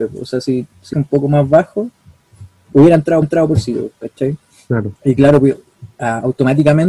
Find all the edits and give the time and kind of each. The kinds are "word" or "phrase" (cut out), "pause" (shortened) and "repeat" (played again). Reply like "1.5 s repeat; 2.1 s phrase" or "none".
0.9 s phrase; 3.2 s repeat; 5.0 s pause

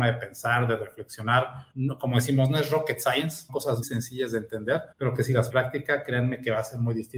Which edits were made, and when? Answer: 1.7 s pause; 3.5 s word; 3.8 s word; 4.9 s pause; 5.5 s phrase

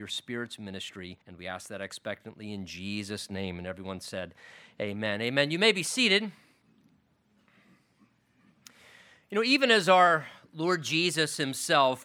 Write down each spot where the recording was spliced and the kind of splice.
1.2 s pause

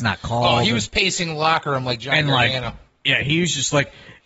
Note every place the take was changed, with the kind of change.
none

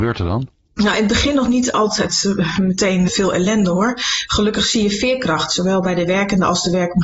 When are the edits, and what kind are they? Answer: 3.1 s word

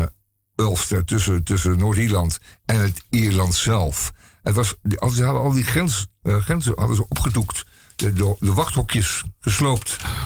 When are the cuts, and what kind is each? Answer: none

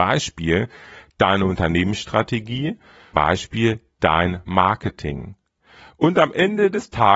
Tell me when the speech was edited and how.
3.1 s word

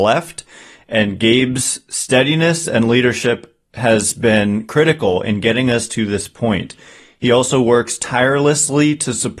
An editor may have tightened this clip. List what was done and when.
none

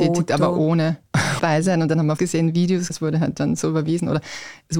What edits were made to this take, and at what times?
1.4 s word; 2.2 s word; 2.9 s word

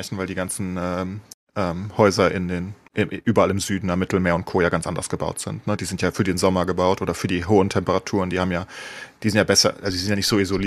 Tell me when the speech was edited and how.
none

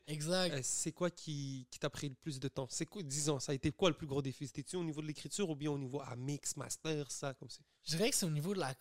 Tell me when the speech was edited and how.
none

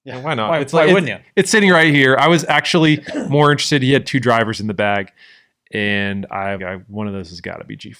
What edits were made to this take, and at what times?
6.6 s word

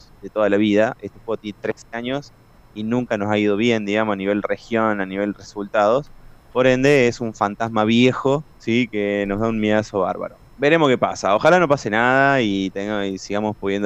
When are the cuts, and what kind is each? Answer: 8.5 s pause; 10.5 s pause

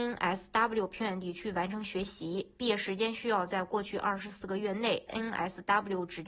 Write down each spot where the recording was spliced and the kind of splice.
5.1 s phrase

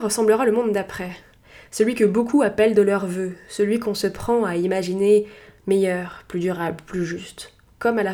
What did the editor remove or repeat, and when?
none

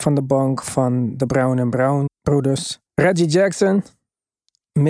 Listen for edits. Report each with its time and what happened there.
2.1 s word; 2.9 s pause

